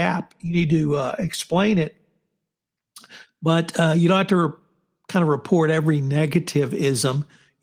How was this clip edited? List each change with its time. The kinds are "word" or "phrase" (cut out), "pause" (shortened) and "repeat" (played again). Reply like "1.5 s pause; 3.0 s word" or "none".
none